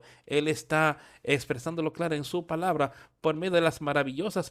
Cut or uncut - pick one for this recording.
uncut